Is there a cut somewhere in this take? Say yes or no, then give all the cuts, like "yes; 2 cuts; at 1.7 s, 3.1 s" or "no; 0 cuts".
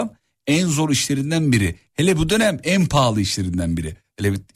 no; 0 cuts